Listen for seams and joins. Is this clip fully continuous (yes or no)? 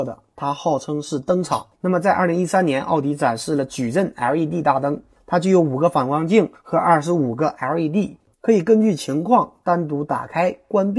yes